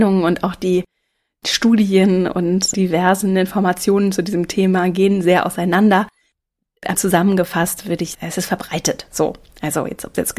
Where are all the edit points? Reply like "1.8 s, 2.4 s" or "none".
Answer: 6.9 s, 8.1 s